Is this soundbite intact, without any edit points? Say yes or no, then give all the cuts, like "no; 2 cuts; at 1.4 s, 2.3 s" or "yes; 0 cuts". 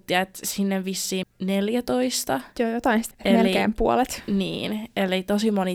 no; 3 cuts; at 1.2 s, 2.5 s, 3.1 s